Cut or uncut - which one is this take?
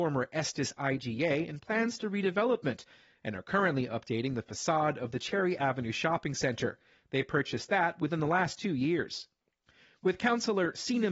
uncut